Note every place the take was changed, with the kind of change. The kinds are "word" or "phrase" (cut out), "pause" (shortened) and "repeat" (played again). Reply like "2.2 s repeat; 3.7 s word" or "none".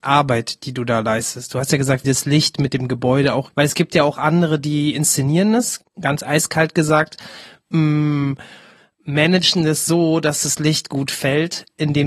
2.0 s word; 3.5 s word; 5.8 s word